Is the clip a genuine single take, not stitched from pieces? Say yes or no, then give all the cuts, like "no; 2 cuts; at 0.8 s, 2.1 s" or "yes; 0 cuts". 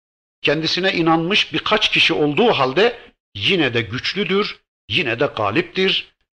yes; 0 cuts